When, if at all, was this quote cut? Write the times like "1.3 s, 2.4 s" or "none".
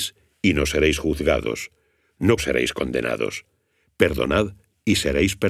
2.4 s